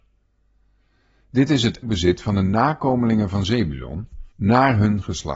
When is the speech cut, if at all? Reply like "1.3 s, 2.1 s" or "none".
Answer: 1.8 s, 4.3 s